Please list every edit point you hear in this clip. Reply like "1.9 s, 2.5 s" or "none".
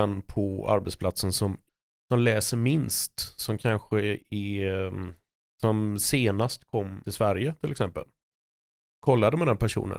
none